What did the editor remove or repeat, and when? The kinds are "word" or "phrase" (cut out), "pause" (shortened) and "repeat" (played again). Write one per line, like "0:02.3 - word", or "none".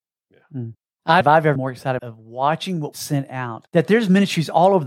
0:01.2 - phrase
0:01.6 - word
0:02.0 - phrase
0:02.9 - word
0:03.7 - pause